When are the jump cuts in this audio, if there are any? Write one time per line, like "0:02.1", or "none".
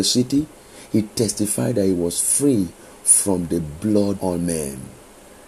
0:04.2